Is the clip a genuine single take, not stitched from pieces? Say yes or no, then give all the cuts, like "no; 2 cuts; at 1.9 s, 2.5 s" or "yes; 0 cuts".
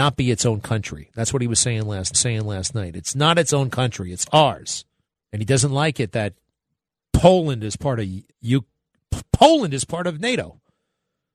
no; 3 cuts; at 2.1 s, 5.0 s, 8.3 s